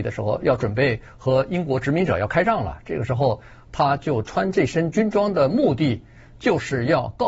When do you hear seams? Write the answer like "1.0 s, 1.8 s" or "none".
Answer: none